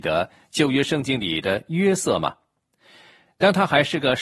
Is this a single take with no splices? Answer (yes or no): yes